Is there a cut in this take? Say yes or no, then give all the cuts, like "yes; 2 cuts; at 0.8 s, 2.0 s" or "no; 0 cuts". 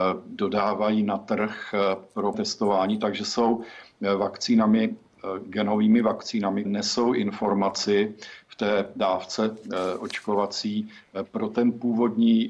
yes; 2 cuts; at 2.3 s, 6.6 s